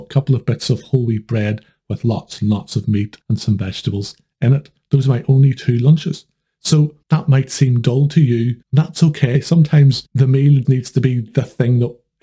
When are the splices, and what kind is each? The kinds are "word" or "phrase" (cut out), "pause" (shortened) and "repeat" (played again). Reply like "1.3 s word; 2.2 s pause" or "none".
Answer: 3.2 s pause; 7.0 s pause; 8.6 s pause; 10.6 s word